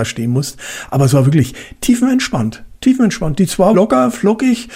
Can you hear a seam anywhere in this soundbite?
yes; 1 cut; at 3.7 s

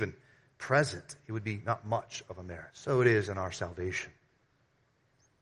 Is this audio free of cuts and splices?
no; 1 cut; at 2.7 s

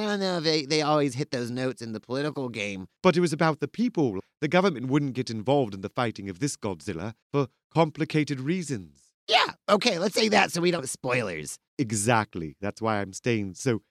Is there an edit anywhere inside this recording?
yes; 5 cuts; at 7.2 s, 9.2 s, 10.1 s, 10.8 s, 11.7 s

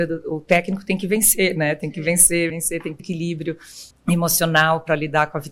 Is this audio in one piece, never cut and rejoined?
no; 3 cuts; at 2.5 s, 3.0 s, 3.9 s

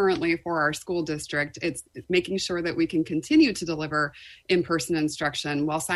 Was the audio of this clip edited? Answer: no; 0 cuts

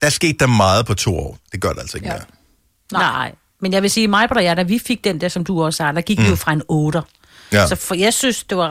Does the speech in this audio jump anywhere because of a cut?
no; 0 cuts

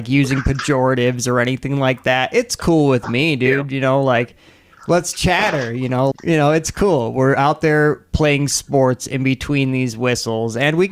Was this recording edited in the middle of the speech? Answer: yes; 1 cut; at 6.1 s

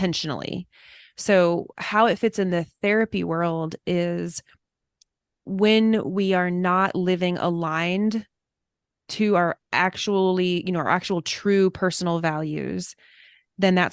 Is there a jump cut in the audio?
no; 0 cuts

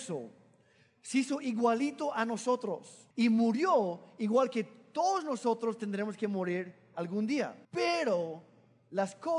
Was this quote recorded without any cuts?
no; 2 cuts; at 3.1 s, 7.6 s

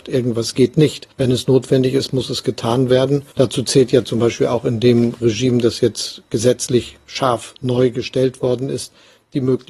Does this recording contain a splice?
yes; 2 cuts; at 1.1 s, 3.3 s

